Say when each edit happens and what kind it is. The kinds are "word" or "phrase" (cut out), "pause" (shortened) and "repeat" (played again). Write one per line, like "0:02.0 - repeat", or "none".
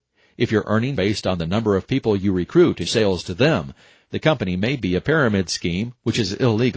0:01.0 - word
0:02.9 - word